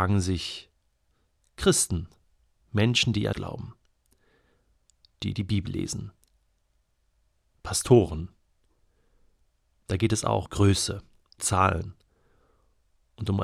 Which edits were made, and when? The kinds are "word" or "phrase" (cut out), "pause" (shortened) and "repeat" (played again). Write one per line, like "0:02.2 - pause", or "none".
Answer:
0:03.3 - word
0:10.5 - word
0:11.4 - word

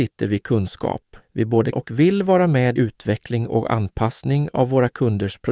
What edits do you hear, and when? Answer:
0:01.2 - pause
0:01.7 - word
0:02.8 - word

